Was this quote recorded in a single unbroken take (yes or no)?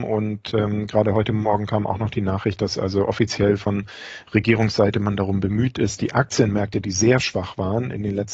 yes